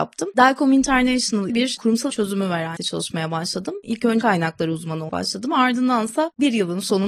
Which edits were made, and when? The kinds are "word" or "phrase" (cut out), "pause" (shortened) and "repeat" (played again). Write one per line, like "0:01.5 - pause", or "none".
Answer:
0:01.5 - word
0:02.1 - word
0:02.8 - word
0:04.2 - word
0:05.1 - word